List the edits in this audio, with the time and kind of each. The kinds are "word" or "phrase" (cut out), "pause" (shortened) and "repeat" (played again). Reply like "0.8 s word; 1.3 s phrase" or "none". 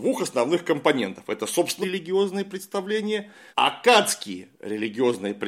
1.8 s word; 3.5 s word